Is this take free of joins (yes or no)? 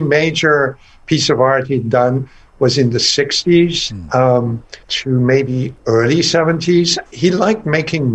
no